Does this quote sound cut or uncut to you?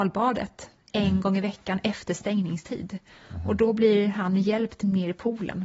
uncut